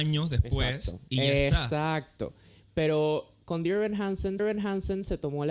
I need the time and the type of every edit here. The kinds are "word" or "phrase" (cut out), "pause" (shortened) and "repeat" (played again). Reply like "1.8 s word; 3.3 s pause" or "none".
4.4 s repeat